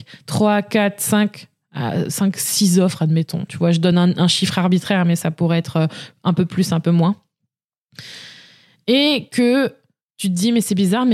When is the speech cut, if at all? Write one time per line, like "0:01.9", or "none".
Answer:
none